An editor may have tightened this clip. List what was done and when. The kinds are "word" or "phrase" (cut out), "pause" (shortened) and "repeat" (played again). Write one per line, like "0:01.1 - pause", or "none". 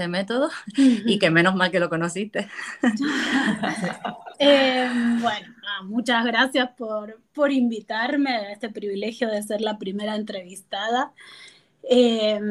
none